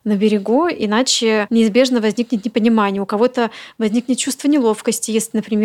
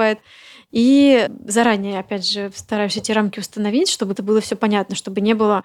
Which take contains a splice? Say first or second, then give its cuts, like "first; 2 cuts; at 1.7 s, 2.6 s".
second; 1 cut; at 4.2 s